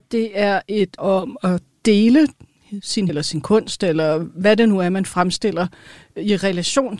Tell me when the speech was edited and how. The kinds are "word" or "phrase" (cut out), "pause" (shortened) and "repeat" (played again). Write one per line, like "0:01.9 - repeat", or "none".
0:01.0 - word
0:03.1 - word